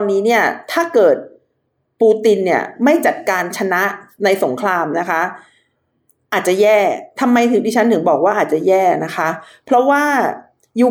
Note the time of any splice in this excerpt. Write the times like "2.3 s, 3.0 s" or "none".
none

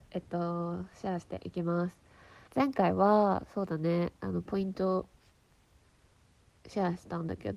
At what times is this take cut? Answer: 2.5 s

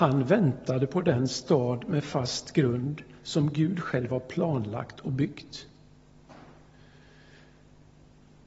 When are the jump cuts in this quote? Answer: none

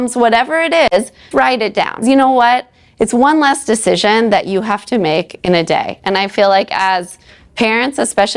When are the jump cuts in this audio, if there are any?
1.3 s, 2.0 s

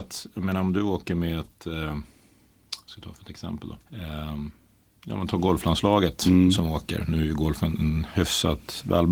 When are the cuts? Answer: 3.8 s

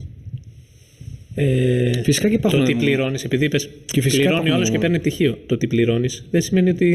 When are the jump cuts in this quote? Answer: none

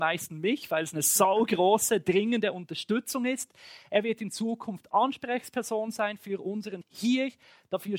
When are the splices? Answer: 6.8 s

